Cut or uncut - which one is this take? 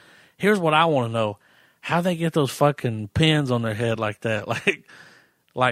uncut